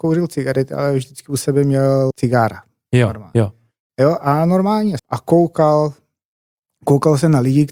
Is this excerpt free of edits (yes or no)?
no